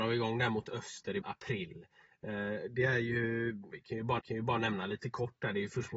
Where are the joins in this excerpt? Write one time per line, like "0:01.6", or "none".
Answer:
0:01.2
0:03.7
0:04.2